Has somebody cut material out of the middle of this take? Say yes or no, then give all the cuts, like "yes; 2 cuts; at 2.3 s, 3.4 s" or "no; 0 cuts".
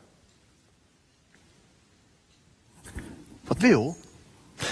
yes; 1 cut; at 3.6 s